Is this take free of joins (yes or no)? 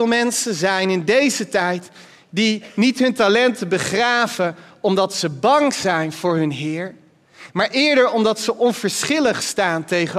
yes